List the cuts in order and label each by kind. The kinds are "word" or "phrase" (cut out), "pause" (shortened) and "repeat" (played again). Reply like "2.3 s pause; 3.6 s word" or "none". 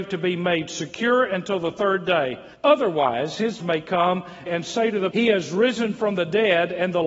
2.5 s pause; 3.6 s word; 4.5 s phrase; 5.1 s word

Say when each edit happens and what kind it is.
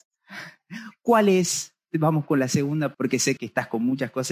2.9 s word; 3.4 s word

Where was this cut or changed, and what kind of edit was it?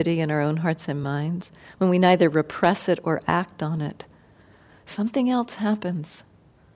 none

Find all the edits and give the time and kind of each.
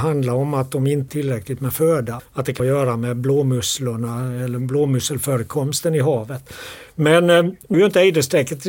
1.1 s word; 2.2 s word; 2.6 s word; 7.7 s word

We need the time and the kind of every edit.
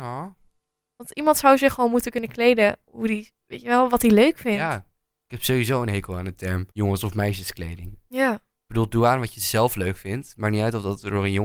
5.0 s pause; 6.7 s pause

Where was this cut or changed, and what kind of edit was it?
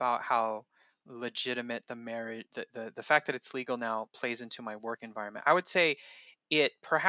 none

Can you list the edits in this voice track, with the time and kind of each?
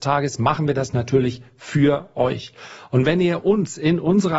none

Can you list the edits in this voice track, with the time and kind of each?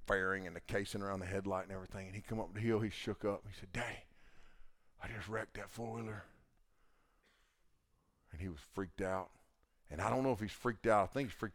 none

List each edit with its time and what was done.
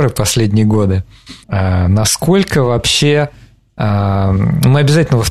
1.4 s pause

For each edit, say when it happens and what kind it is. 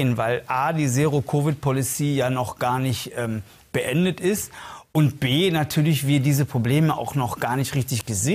none

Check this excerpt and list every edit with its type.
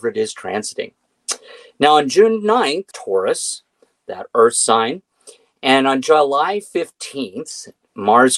2.9 s phrase

